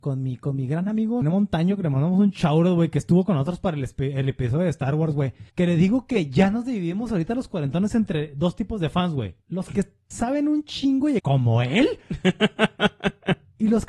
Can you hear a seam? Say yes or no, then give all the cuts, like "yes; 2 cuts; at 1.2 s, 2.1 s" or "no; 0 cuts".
yes; 4 cuts; at 1.2 s, 5.5 s, 9.4 s, 11.2 s